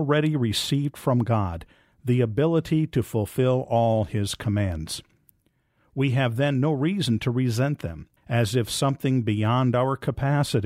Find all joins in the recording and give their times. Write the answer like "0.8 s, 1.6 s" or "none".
8.2 s